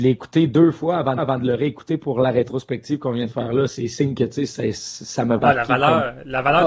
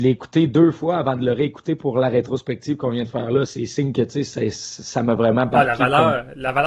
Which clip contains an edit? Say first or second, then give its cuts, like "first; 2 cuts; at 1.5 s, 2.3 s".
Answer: first; 2 cuts; at 1.2 s, 5.4 s